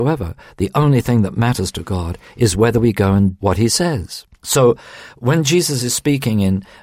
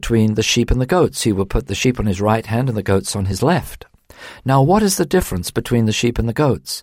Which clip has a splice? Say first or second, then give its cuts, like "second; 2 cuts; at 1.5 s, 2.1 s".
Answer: first; 2 cuts; at 3.4 s, 4.3 s